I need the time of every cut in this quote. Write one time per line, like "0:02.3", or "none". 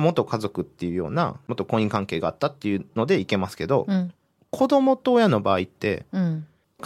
none